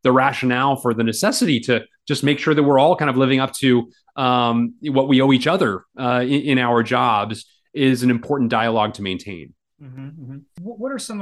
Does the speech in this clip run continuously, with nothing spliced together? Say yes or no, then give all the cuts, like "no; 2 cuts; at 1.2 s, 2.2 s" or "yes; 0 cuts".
yes; 0 cuts